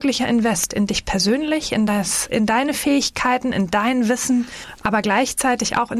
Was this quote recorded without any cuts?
yes; 0 cuts

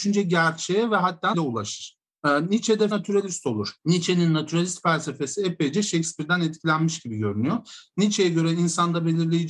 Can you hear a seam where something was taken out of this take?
yes; 3 cuts; at 1.3 s, 2.9 s, 3.8 s

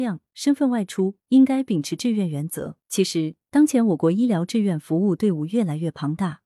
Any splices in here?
yes; 1 cut; at 2.8 s

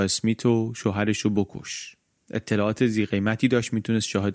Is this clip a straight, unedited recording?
yes; 0 cuts

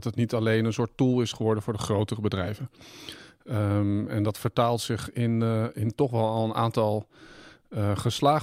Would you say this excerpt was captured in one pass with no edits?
yes; 0 cuts

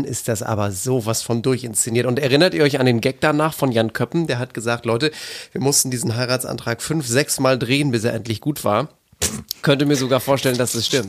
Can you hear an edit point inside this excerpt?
yes; 1 cut; at 9.0 s

